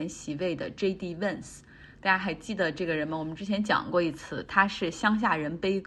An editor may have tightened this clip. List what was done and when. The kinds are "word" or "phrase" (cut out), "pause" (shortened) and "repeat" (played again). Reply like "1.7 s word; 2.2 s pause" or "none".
none